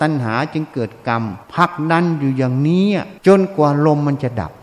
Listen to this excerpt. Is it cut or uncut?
cut